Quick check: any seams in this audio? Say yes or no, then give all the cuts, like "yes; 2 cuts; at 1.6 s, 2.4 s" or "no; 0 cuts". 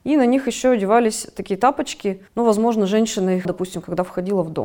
yes; 2 cuts; at 2.3 s, 3.4 s